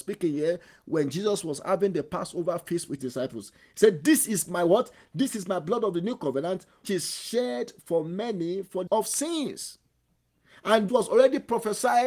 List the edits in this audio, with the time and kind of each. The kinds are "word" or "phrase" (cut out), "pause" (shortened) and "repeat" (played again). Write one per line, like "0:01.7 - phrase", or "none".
0:03.0 - word
0:06.8 - word
0:08.9 - word
0:10.9 - word